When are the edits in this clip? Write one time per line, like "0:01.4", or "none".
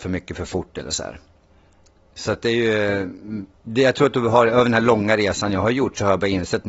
none